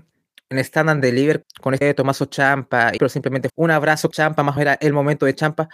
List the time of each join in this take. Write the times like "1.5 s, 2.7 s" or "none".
1.4 s, 1.8 s, 3.0 s, 3.5 s, 4.1 s, 4.6 s